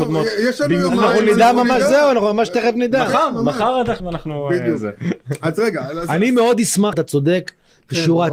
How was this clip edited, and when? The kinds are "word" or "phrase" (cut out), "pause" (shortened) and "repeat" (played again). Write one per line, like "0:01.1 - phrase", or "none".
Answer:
0:04.0 - word
0:06.9 - word